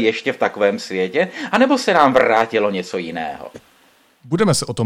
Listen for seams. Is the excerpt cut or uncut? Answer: uncut